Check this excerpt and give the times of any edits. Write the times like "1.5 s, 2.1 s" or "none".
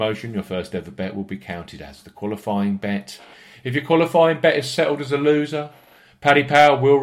none

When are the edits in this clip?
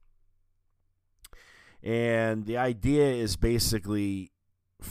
2.4 s

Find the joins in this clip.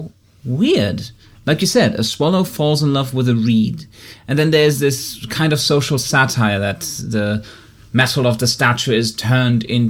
none

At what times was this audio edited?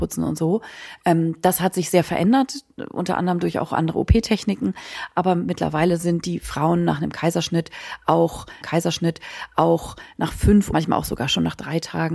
8.6 s, 10.7 s

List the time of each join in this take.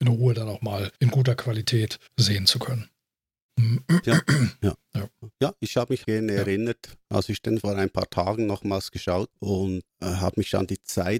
0.9 s, 2.1 s, 6.0 s, 7.6 s, 9.3 s, 9.9 s

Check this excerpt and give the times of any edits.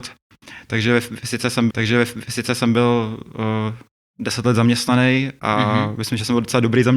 1.7 s

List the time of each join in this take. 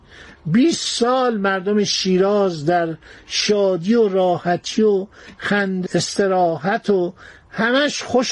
5.9 s

